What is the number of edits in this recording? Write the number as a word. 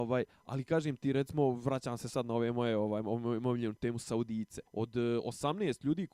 one